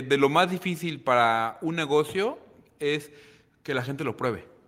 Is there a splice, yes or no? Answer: no